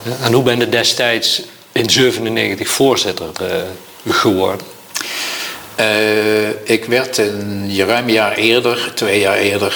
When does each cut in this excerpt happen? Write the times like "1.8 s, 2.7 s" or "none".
none